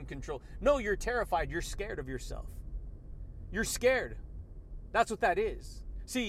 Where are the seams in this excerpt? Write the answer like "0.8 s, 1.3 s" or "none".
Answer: none